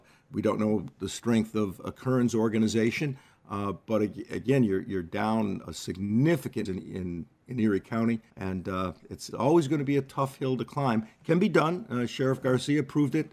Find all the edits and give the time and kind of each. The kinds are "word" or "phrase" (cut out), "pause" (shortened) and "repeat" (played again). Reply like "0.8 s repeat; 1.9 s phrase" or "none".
5.6 s word; 6.7 s phrase; 8.3 s pause; 9.3 s word